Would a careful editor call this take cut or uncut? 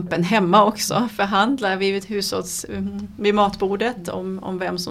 uncut